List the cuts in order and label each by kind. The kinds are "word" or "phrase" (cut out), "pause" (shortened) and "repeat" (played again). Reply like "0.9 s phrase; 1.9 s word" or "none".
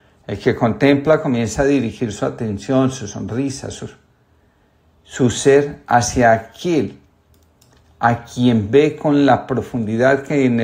none